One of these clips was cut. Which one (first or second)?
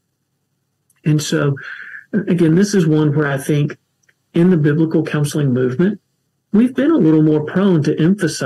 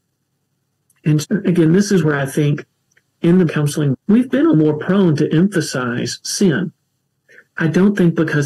second